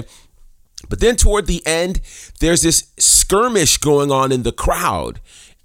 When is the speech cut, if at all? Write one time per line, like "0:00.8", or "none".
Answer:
none